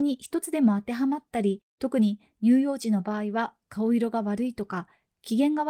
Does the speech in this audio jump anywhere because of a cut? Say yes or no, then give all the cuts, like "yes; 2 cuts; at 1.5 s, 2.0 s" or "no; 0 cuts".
yes; 1 cut; at 1.7 s